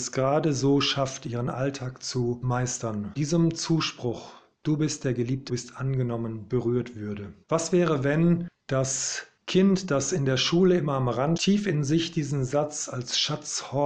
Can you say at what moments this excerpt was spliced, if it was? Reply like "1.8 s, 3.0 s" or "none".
3.2 s, 5.5 s, 7.4 s, 11.4 s